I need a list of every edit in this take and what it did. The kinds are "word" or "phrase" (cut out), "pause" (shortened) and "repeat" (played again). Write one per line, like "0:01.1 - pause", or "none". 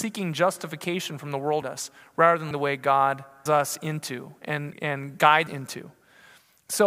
0:01.6 - word
0:02.5 - word
0:03.5 - word
0:04.7 - word
0:05.5 - word